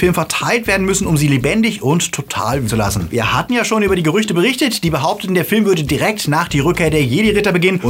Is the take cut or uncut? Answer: cut